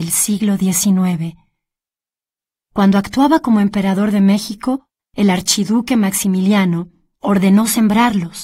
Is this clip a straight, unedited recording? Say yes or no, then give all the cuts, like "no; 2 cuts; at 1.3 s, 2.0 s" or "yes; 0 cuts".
yes; 0 cuts